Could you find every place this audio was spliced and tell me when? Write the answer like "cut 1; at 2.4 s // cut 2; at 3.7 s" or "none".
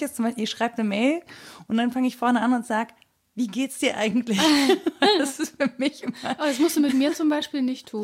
none

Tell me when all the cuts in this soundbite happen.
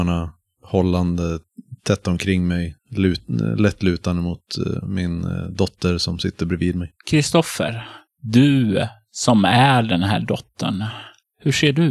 cut 1; at 7.0 s

